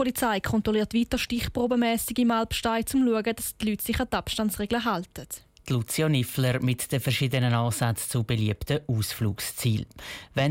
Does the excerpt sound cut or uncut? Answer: uncut